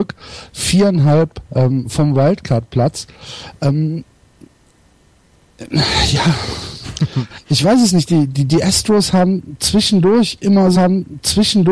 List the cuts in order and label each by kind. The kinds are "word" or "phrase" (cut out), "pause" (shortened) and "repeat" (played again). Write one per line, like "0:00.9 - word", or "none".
0:01.4 - pause
0:10.7 - repeat